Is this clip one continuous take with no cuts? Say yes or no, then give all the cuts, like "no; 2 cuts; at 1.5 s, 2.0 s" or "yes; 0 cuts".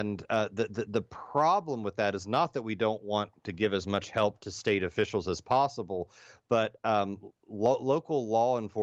yes; 0 cuts